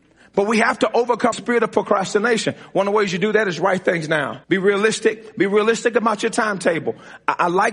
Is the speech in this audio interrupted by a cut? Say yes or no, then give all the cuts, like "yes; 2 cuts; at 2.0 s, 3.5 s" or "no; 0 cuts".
yes; 2 cuts; at 1.3 s, 4.4 s